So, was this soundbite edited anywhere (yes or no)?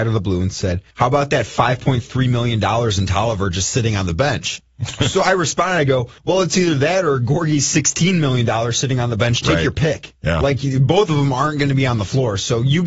yes